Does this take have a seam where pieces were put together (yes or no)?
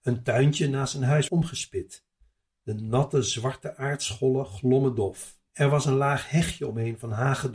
yes